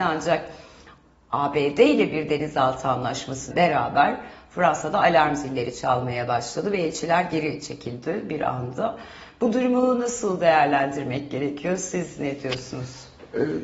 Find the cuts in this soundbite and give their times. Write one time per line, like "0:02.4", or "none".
0:03.5